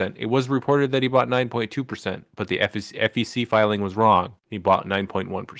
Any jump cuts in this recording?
yes; 1 cut; at 4.4 s

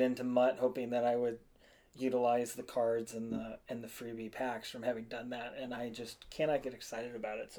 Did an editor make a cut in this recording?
no; 0 cuts

